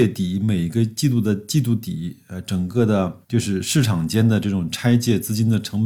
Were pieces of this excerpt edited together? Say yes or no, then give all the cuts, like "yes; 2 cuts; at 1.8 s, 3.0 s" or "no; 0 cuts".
yes; 1 cut; at 3.2 s